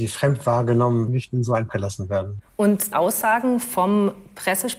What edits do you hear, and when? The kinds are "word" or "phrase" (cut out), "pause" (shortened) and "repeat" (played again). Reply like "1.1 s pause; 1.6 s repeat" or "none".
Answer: 1.1 s word; 1.7 s word; 2.9 s word